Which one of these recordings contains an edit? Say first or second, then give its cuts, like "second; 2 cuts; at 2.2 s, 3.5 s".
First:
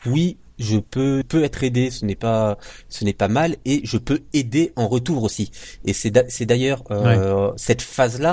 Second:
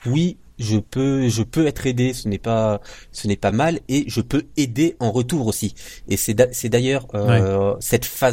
first; 1 cut; at 1.2 s